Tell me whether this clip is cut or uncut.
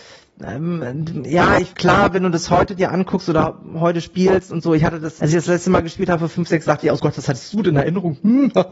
cut